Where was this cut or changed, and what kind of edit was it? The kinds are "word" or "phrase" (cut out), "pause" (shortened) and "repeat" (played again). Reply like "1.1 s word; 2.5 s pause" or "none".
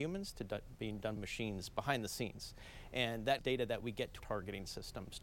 1.2 s word; 3.4 s word; 4.2 s word